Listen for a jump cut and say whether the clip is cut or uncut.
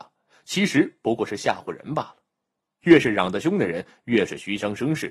uncut